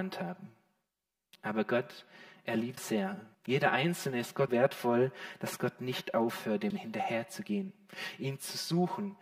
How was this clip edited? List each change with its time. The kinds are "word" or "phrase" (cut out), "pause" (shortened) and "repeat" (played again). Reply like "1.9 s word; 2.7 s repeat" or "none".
2.8 s word; 3.3 s pause; 4.5 s word; 6.7 s word